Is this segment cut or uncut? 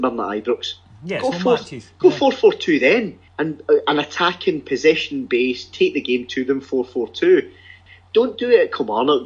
cut